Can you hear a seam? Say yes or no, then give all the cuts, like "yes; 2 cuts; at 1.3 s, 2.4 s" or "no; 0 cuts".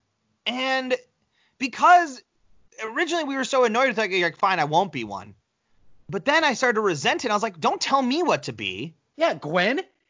no; 0 cuts